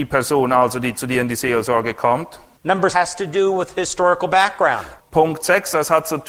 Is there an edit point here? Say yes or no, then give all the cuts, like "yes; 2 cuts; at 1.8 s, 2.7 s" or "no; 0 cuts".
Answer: yes; 1 cut; at 2.9 s